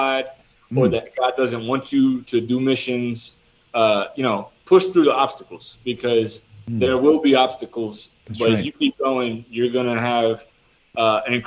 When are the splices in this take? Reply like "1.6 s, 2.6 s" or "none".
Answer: none